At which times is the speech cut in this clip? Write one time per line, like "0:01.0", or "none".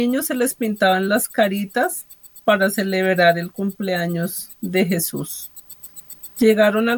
none